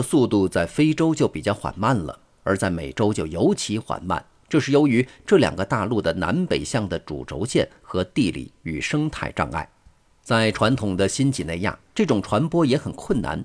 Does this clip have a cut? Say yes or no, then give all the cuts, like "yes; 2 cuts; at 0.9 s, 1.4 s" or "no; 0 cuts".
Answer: no; 0 cuts